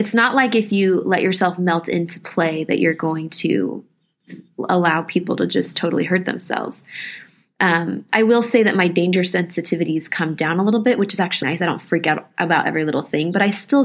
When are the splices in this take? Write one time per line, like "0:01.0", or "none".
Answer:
0:11.4